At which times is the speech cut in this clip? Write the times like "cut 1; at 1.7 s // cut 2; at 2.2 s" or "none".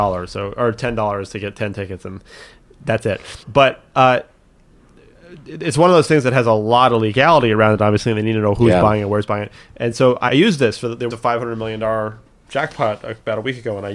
cut 1; at 3.4 s // cut 2; at 10.3 s // cut 3; at 11.1 s